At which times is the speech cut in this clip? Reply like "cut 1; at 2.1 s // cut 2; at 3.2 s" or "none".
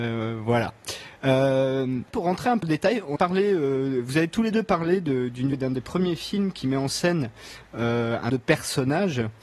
cut 1; at 2.1 s // cut 2; at 2.6 s // cut 3; at 3.2 s // cut 4; at 5.5 s // cut 5; at 8.3 s